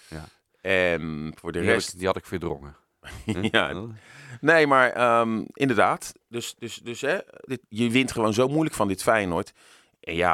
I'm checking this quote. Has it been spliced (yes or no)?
no